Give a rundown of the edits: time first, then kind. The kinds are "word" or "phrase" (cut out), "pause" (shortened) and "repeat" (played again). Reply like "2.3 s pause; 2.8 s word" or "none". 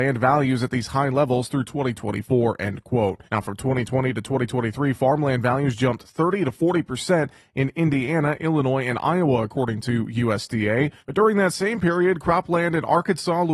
3.3 s pause; 11.0 s pause